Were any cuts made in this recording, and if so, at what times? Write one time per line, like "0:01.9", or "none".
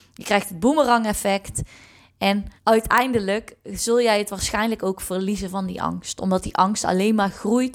0:02.6